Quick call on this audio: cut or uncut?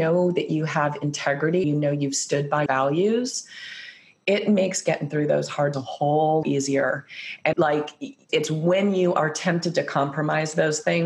cut